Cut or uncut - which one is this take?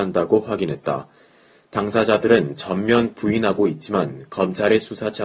uncut